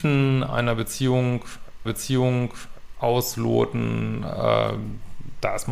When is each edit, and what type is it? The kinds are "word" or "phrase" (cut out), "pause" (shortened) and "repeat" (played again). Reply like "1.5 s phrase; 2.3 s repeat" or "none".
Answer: 1.8 s repeat